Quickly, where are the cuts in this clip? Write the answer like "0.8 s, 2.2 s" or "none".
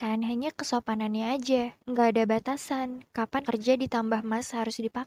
1.8 s, 3.4 s